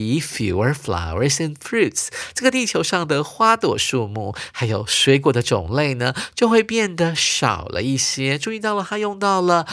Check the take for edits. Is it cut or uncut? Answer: uncut